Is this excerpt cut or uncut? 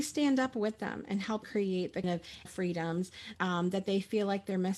cut